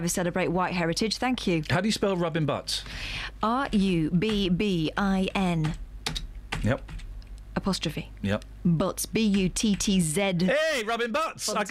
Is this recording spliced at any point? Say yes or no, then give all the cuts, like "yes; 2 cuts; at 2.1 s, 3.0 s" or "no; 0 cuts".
no; 0 cuts